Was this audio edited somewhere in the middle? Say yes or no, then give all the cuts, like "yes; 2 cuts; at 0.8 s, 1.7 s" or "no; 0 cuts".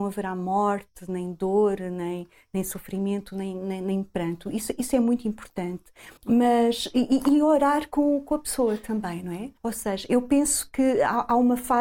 yes; 2 cuts; at 6.2 s, 9.6 s